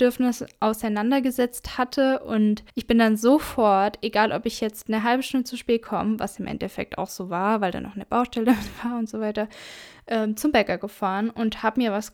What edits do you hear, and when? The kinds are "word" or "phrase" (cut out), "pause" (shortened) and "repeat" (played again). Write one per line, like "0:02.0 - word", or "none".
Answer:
0:02.7 - pause